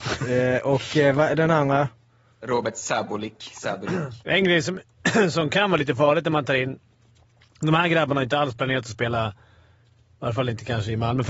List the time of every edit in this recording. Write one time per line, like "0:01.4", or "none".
0:04.2